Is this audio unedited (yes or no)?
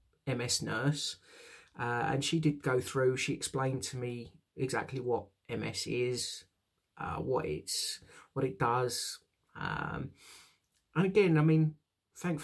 yes